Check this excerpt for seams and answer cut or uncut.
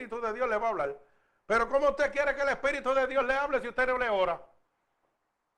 uncut